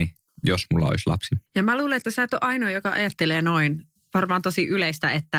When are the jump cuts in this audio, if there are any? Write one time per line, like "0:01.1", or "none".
0:01.5